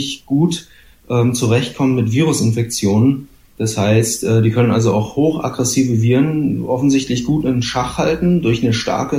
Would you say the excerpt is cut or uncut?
uncut